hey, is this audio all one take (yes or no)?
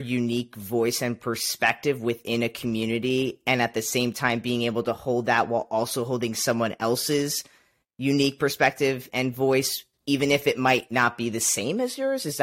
yes